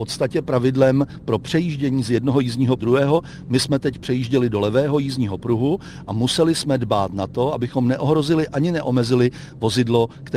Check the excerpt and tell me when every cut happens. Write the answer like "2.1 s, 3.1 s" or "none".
2.8 s